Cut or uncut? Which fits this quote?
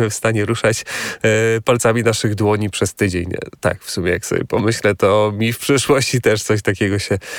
uncut